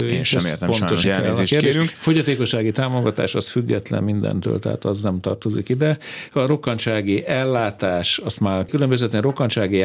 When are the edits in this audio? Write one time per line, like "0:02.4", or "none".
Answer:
0:01.0
0:08.7